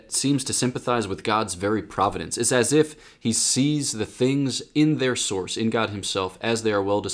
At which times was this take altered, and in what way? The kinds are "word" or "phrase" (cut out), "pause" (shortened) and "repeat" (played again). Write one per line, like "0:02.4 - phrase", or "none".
none